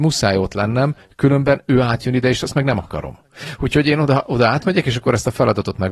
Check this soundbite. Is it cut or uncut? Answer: uncut